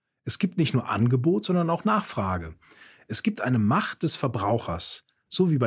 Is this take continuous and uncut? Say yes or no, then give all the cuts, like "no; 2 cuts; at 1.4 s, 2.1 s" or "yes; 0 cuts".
yes; 0 cuts